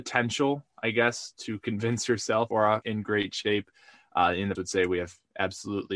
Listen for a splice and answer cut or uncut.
cut